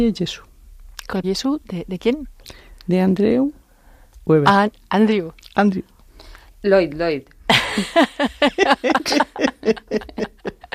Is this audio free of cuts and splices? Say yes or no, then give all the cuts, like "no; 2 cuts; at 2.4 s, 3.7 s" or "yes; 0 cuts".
no; 3 cuts; at 1.2 s, 4.2 s, 6.5 s